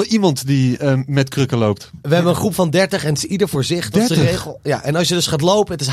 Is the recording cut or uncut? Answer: uncut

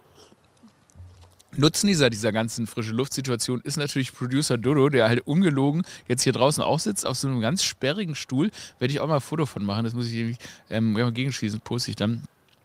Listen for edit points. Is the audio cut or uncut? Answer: uncut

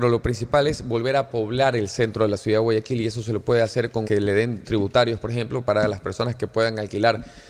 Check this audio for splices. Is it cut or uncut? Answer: cut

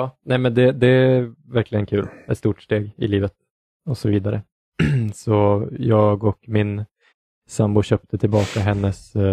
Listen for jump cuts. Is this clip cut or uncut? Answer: uncut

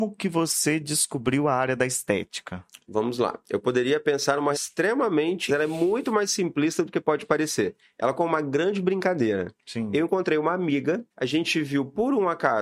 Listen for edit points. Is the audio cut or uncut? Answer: cut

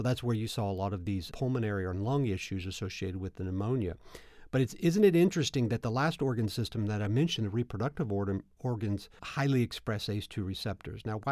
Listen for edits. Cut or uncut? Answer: cut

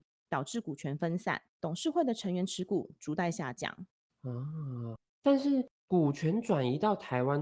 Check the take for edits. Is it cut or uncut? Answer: cut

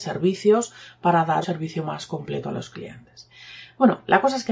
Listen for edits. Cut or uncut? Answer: cut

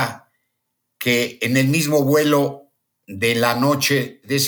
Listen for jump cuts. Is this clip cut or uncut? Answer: uncut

